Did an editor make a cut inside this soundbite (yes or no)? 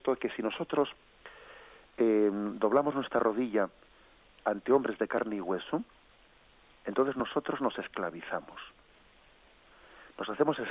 no